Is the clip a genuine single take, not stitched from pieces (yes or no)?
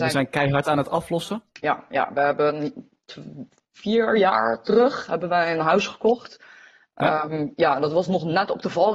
yes